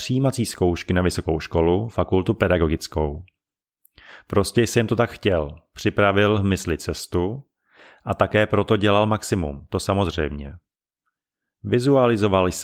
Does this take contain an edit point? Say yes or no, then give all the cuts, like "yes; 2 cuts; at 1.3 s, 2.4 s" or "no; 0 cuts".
no; 0 cuts